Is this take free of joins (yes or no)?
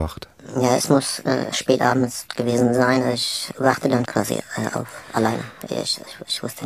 no